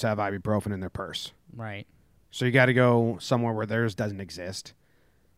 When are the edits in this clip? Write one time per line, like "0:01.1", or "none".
0:01.4
0:04.0